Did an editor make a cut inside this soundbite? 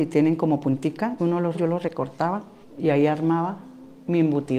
yes; 3 cuts; at 1.2 s, 1.5 s, 2.6 s

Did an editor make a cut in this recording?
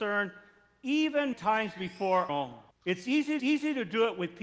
yes; 4 cuts; at 1.3 s, 2.3 s, 2.7 s, 3.4 s

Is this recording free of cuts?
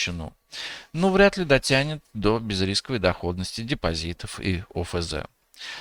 yes; 0 cuts

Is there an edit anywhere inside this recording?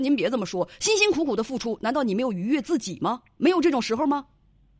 no; 0 cuts

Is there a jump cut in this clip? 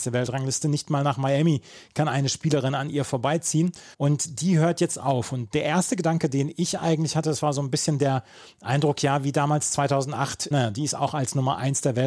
yes; 2 cuts; at 3.9 s, 10.5 s

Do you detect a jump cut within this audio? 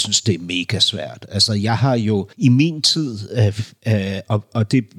yes; 1 cut; at 2.3 s

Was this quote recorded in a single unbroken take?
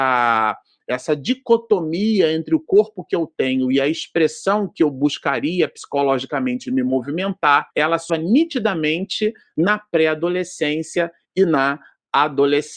no; 2 cuts; at 7.7 s, 8.1 s

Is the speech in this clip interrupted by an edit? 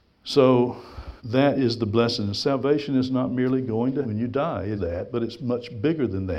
yes; 3 cuts; at 1.2 s, 4.0 s, 4.7 s

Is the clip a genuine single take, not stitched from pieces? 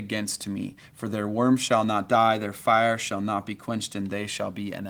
yes; 0 cuts

